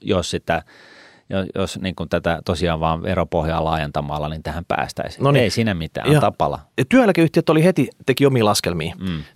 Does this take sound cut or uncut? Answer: uncut